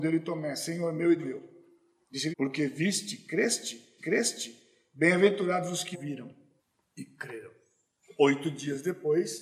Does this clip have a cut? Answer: yes; 5 cuts; at 1.2 s, 2.3 s, 4.0 s, 5.9 s, 6.6 s

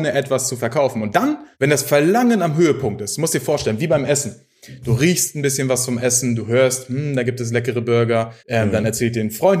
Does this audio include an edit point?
yes; 2 cuts; at 1.5 s, 8.4 s

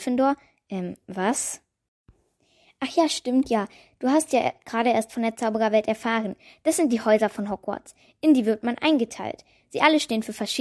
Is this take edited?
no; 0 cuts

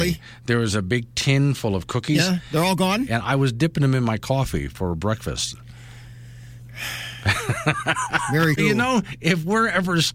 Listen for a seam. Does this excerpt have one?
yes; 1 cut; at 8.6 s

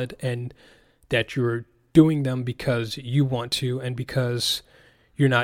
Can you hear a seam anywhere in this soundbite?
no; 0 cuts

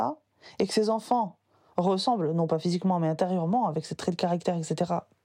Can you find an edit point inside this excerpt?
no; 0 cuts

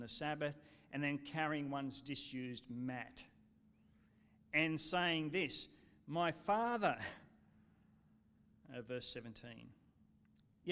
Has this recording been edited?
no; 0 cuts

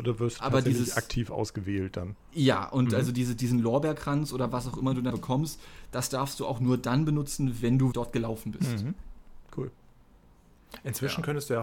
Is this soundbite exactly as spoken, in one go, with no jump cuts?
no; 3 cuts; at 2.2 s, 5.1 s, 7.9 s

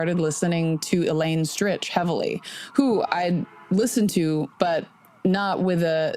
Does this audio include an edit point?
no; 0 cuts

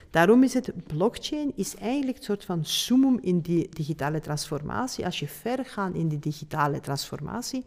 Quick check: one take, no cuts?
yes; 0 cuts

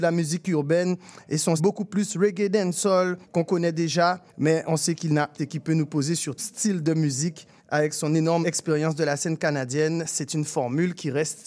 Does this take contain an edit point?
yes; 7 cuts; at 1.6 s, 3.2 s, 4.3 s, 5.4 s, 6.4 s, 7.6 s, 8.4 s

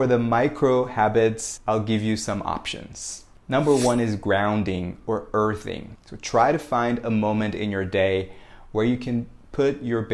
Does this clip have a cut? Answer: no; 0 cuts

